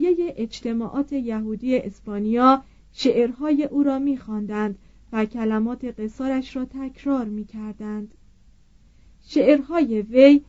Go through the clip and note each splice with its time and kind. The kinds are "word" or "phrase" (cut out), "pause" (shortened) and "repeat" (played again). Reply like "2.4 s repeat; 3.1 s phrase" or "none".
none